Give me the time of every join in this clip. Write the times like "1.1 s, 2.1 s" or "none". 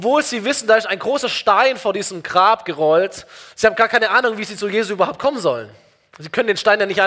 none